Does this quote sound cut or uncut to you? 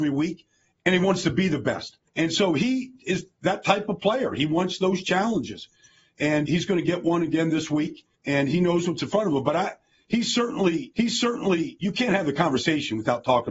cut